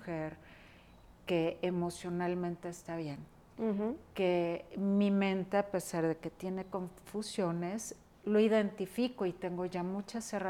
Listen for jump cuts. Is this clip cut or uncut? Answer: uncut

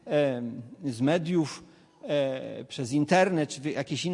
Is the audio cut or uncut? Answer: uncut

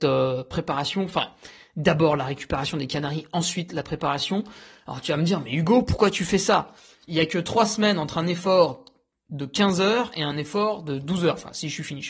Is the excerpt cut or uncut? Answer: uncut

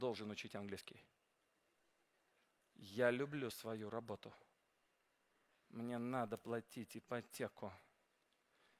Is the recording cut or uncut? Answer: uncut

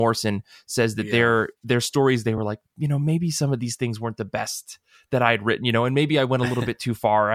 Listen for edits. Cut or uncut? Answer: uncut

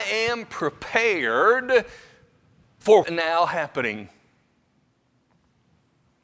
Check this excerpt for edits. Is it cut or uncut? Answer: cut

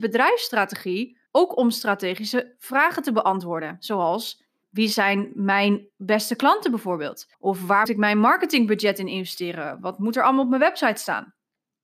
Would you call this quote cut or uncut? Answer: cut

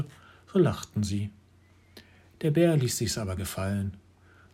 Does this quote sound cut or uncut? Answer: cut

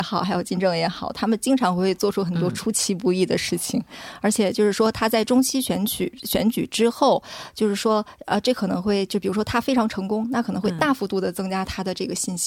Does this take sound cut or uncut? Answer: uncut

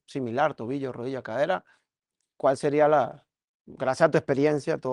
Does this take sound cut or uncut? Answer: uncut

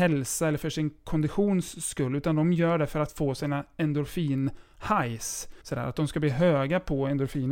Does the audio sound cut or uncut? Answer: cut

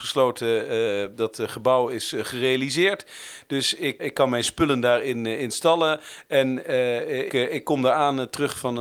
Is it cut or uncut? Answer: cut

